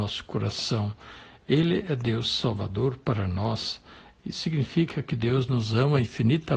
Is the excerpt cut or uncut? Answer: uncut